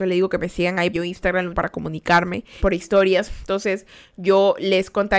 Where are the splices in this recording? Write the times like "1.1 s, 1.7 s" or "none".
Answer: 0.9 s, 1.5 s, 2.6 s